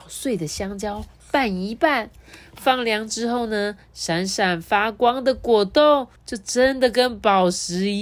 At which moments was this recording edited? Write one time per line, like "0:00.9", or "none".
0:06.2